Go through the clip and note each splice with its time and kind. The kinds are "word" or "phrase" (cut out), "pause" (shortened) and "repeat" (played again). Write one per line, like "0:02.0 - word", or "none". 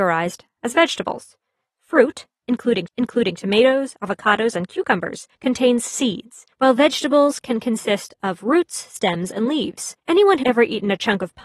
0:02.9 - repeat
0:05.3 - pause
0:06.5 - pause
0:10.0 - pause
0:10.4 - word